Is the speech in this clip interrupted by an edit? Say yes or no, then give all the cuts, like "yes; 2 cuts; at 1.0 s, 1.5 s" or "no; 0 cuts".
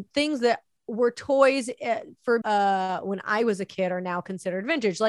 yes; 1 cut; at 2.4 s